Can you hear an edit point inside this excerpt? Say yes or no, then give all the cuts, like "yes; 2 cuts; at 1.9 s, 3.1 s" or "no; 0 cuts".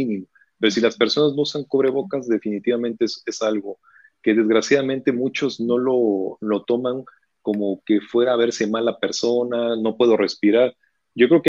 no; 0 cuts